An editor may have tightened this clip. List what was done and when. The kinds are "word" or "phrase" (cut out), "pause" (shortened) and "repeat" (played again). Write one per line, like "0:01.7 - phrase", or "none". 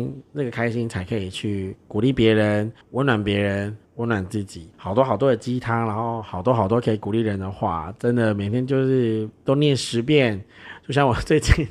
0:02.8 - pause
0:03.9 - pause
0:04.7 - pause